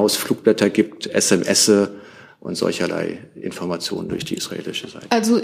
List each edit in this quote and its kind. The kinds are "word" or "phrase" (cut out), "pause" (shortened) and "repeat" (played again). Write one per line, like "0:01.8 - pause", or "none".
none